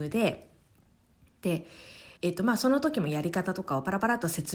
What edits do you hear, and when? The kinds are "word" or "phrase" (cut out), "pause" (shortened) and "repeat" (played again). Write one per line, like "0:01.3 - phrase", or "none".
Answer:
0:02.2 - pause